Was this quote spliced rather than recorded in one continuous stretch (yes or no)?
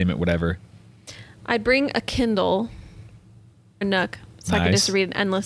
yes